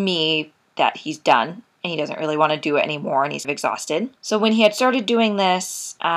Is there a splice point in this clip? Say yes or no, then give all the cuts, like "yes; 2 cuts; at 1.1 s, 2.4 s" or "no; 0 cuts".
yes; 2 cuts; at 3.4 s, 4.2 s